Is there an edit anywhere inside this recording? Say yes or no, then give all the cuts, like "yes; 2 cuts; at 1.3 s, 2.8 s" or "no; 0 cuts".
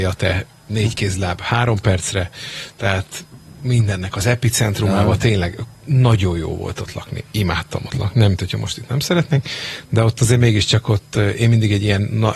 no; 0 cuts